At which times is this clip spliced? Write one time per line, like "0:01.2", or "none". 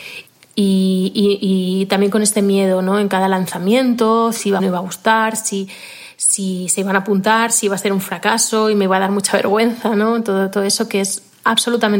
0:04.6